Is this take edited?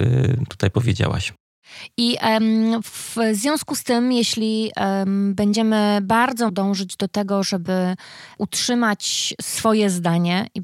yes; 1 cut; at 6.5 s

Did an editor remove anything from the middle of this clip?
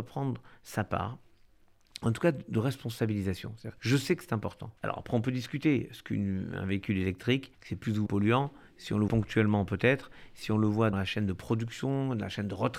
yes; 6 cuts; at 3.8 s, 4.8 s, 7.5 s, 8.1 s, 9.1 s, 10.9 s

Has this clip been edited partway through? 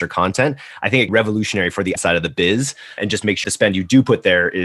yes; 4 cuts; at 1.1 s, 2.0 s, 3.0 s, 3.4 s

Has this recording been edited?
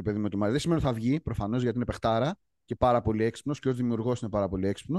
no; 0 cuts

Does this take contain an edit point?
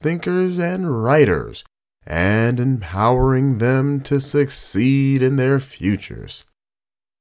no; 0 cuts

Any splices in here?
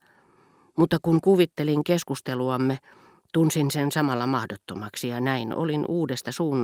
no; 0 cuts

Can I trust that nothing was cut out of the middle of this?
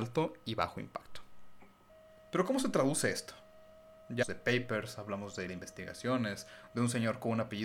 no; 3 cuts; at 1.9 s, 4.2 s, 5.5 s

